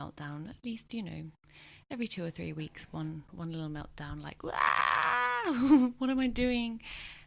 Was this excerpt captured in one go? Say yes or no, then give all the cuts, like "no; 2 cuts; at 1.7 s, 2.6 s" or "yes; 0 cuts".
yes; 0 cuts